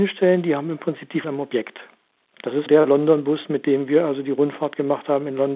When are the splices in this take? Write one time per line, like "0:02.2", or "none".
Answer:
0:01.2
0:02.7